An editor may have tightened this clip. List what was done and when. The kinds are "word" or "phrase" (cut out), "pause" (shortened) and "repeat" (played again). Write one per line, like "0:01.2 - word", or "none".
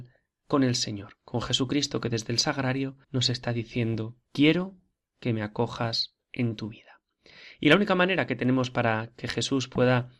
0:01.2 - pause
0:03.0 - pause
0:04.3 - pause